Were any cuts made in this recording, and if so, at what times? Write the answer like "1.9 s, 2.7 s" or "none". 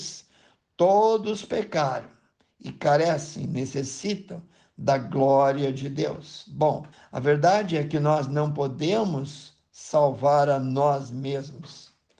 6.9 s